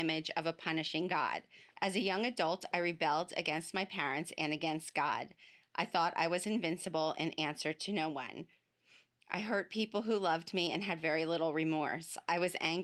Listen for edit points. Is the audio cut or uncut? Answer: cut